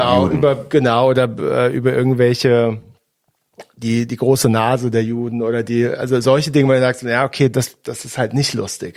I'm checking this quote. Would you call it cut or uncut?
uncut